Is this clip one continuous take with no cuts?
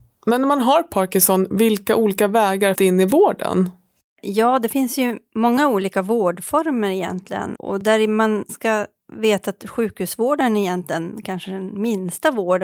no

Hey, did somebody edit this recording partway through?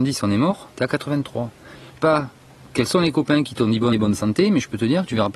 yes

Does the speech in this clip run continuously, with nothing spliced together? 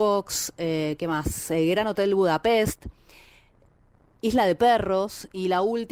yes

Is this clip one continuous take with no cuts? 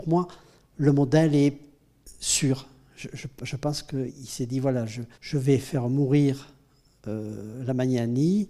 no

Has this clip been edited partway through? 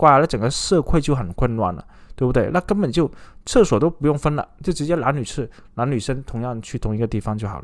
no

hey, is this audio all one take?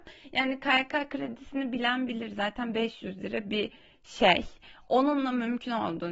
yes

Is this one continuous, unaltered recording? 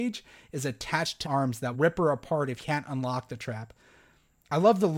no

